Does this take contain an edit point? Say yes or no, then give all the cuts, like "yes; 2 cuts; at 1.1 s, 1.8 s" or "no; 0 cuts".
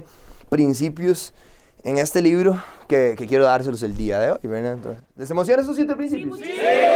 no; 0 cuts